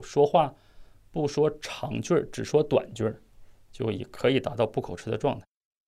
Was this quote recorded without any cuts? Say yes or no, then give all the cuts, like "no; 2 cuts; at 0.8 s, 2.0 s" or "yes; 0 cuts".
yes; 0 cuts